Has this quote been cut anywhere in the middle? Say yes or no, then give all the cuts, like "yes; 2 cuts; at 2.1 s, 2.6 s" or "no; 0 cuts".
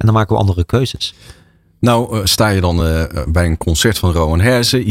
no; 0 cuts